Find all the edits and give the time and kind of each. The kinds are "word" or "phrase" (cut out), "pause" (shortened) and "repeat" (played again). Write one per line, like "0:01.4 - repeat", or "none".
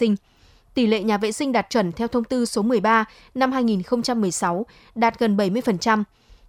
none